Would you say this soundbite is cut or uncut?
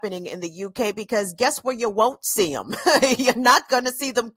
uncut